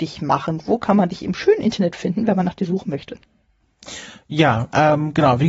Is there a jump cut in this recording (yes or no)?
no